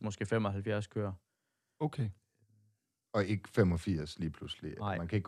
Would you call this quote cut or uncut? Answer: uncut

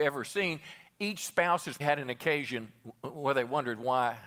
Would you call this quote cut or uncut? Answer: cut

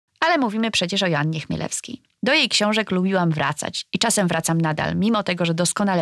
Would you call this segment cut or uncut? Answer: uncut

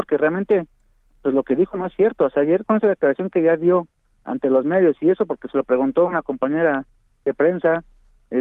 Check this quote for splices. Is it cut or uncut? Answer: uncut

